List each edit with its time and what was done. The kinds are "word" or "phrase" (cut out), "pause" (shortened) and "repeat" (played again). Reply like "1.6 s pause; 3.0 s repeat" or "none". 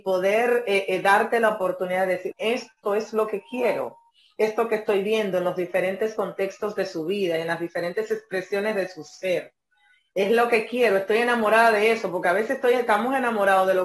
2.3 s word